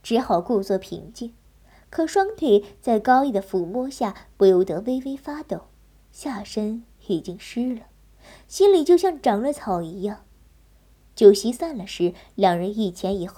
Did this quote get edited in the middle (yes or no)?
no